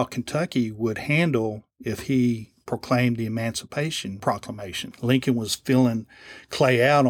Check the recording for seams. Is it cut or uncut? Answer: uncut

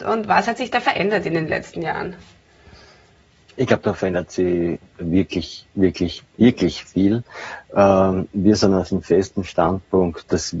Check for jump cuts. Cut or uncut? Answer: uncut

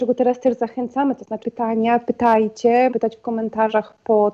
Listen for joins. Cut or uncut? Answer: cut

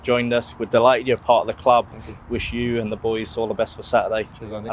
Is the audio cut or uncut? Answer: uncut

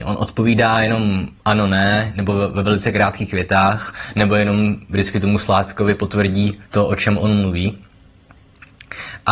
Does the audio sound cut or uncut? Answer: cut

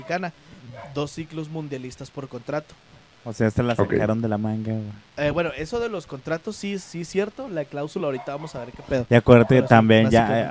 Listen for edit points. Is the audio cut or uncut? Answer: uncut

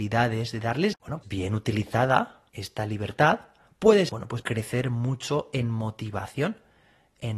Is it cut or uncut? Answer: cut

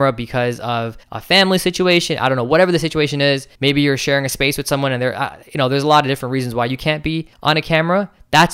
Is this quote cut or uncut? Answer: cut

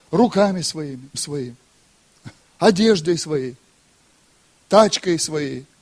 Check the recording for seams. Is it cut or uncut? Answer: cut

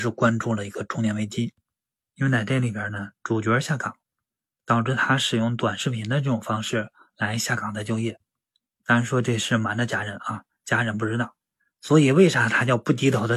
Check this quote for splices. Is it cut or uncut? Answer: uncut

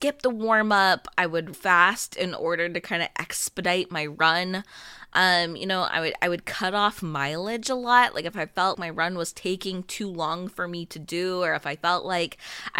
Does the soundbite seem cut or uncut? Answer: cut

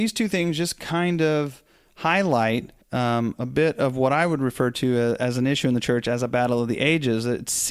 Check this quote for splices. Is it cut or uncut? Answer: cut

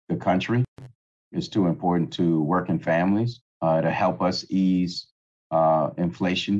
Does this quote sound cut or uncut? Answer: cut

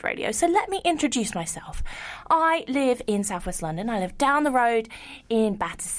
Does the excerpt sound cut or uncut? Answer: uncut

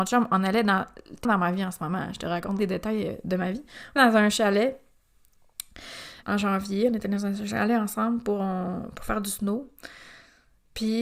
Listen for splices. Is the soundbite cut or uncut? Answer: cut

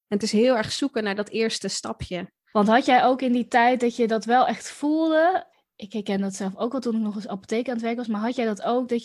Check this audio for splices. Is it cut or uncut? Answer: uncut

